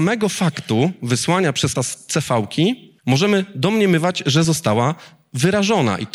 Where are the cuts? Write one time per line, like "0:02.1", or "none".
0:01.8
0:03.0
0:04.4